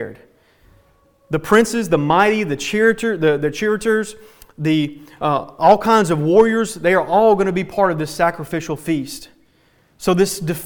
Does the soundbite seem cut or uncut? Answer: uncut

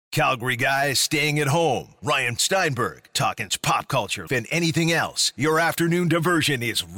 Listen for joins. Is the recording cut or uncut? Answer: cut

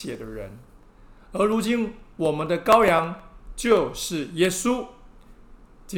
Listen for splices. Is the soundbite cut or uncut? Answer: uncut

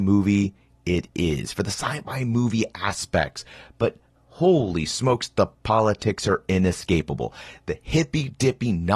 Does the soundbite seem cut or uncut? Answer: uncut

